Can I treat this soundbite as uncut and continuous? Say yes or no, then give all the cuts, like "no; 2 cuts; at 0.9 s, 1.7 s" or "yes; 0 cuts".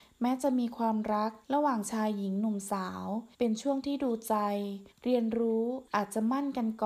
no; 4 cuts; at 1.4 s, 3.3 s, 4.9 s, 5.9 s